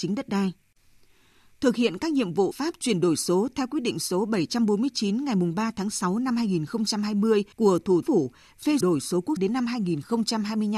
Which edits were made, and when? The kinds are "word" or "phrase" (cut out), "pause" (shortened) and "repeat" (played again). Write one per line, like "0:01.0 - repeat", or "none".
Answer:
0:02.5 - word
0:07.5 - pause
0:08.0 - phrase
0:08.8 - phrase
0:09.4 - word